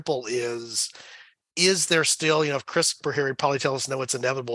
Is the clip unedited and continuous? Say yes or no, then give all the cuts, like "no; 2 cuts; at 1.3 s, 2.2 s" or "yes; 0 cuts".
yes; 0 cuts